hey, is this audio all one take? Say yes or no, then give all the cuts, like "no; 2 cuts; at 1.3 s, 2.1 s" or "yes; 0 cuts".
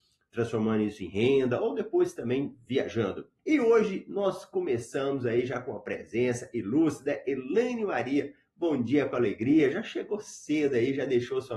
no; 1 cut; at 3.4 s